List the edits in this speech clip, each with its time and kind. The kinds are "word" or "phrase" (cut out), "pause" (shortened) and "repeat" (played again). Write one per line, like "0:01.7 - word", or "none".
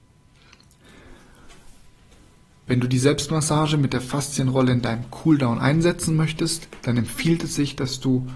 none